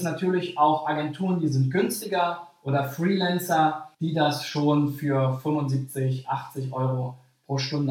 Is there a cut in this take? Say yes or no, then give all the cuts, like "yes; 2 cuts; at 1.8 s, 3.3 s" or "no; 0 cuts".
yes; 1 cut; at 3.9 s